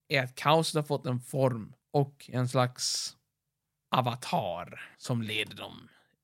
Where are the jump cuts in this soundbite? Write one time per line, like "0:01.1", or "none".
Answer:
0:01.8
0:04.9